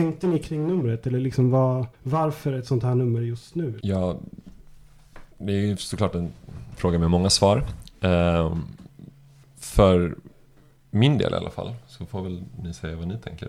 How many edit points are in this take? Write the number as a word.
three